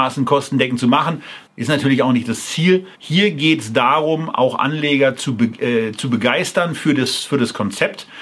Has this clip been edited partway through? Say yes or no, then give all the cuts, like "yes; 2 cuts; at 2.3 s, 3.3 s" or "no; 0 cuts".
yes; 2 cuts; at 1.5 s, 2.9 s